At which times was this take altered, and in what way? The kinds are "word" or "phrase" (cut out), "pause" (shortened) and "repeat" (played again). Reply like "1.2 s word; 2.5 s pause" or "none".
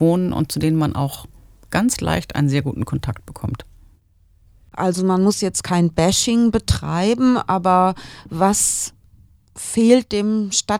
none